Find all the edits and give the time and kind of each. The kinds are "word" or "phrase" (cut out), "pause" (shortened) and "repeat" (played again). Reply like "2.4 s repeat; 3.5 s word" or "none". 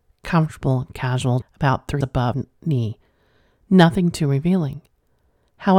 1.4 s word; 2.0 s word; 2.3 s word

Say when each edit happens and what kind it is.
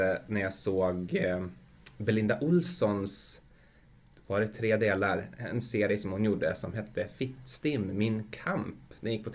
none

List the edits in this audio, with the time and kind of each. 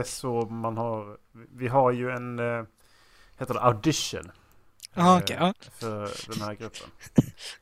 none

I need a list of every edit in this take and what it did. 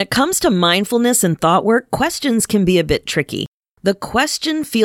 none

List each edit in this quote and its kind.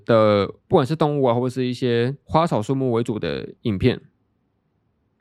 3.6 s pause

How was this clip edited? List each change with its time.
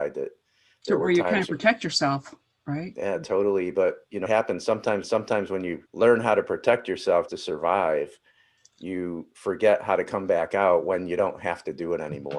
4.3 s word; 5.0 s repeat; 5.9 s pause; 7.3 s word

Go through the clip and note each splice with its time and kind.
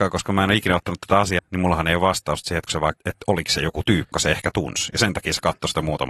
1.4 s word; 2.7 s word; 3.0 s word; 4.1 s word

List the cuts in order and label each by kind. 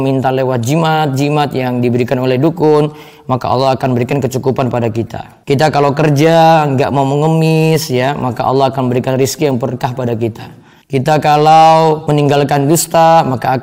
none

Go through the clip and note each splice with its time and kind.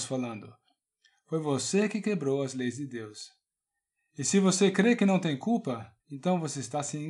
6.0 s pause

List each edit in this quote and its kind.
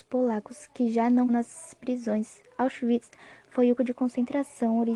1.3 s word; 3.8 s word

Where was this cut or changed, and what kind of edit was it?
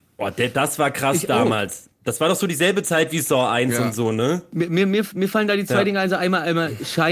none

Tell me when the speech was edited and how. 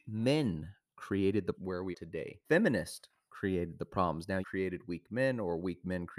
1.5 s word; 1.9 s word; 2.4 s pause; 4.4 s phrase

